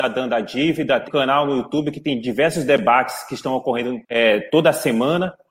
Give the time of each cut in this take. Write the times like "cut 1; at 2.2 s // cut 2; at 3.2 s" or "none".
cut 1; at 1.1 s // cut 2; at 4.0 s